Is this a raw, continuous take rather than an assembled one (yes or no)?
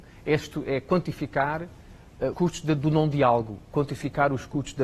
no